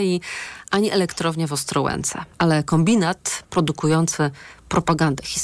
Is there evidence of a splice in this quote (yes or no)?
yes